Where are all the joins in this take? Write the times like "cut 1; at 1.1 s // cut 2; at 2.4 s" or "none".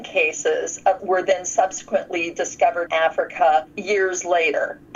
cut 1; at 1.0 s // cut 2; at 2.9 s